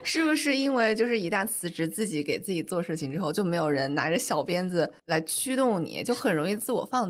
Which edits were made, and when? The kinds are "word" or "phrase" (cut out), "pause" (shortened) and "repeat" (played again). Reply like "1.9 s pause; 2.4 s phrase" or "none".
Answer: 5.0 s pause

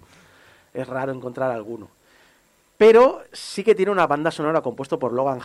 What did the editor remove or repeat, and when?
none

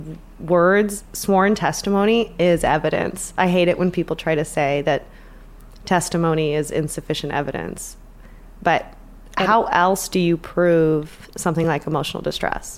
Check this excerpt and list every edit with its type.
none

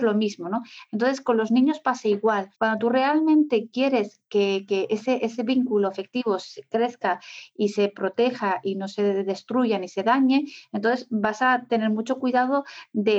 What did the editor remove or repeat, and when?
2.5 s pause

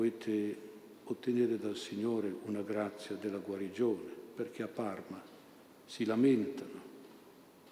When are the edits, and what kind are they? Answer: none

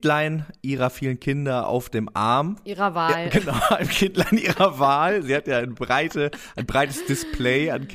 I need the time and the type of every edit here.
none

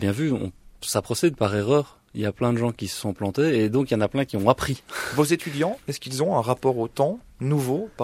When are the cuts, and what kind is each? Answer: 1.4 s phrase

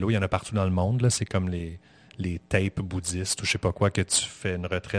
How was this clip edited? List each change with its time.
none

